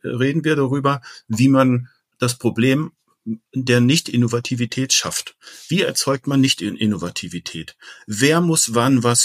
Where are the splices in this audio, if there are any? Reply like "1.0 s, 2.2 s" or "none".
none

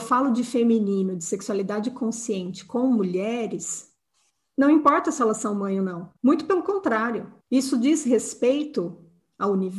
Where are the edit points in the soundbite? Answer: 4.3 s, 6.2 s, 7.4 s

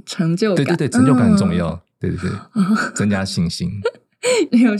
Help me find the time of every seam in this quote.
none

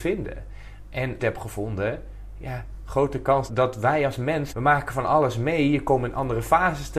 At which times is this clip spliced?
1.2 s, 3.5 s, 4.5 s

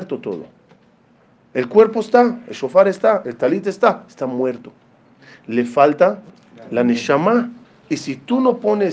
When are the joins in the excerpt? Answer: 7.6 s

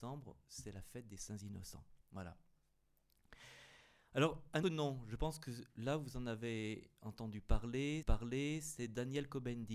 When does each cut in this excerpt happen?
2.0 s, 4.6 s, 8.0 s

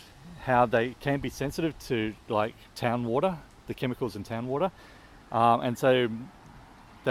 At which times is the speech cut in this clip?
none

